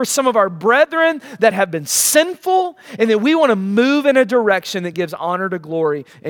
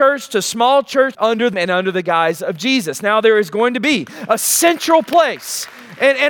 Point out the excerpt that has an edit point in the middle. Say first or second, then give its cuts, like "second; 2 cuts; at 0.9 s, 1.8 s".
second; 2 cuts; at 1.1 s, 1.5 s